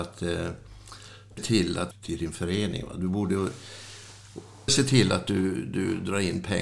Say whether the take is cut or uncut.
cut